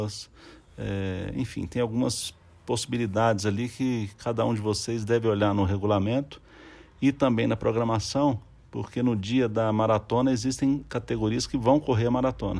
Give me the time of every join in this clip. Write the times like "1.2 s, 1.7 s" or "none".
none

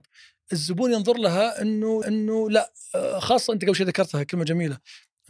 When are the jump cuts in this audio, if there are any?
2.0 s

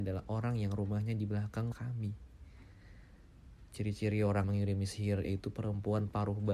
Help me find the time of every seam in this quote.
1.7 s, 4.4 s, 5.2 s

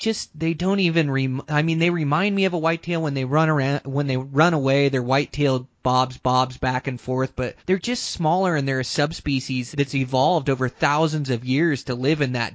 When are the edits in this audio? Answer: 6.2 s, 7.6 s, 9.7 s

